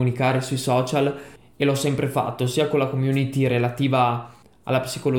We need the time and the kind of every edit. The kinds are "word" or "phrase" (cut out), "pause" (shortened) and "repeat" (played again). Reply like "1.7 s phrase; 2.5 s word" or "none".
none